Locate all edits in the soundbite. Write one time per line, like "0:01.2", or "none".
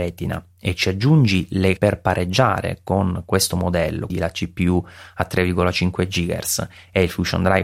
0:01.8
0:04.1